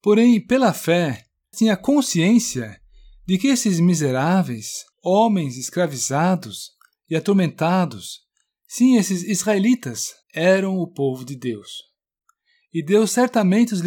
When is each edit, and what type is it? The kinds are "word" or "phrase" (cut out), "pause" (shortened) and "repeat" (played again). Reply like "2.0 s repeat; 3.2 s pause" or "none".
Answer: 1.5 s word; 4.9 s pause; 10.2 s pause